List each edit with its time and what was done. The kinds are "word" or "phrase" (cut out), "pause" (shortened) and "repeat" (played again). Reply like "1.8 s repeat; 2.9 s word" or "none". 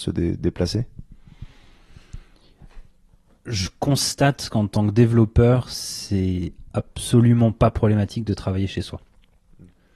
none